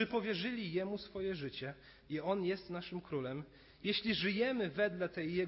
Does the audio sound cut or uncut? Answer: uncut